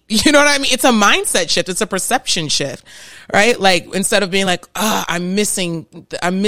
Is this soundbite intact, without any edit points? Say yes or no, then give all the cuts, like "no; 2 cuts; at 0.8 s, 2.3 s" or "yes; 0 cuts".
yes; 0 cuts